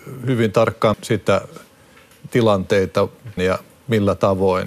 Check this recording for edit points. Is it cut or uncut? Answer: cut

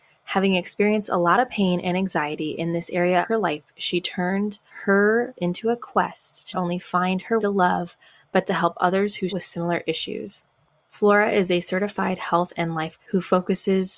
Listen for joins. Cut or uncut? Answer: cut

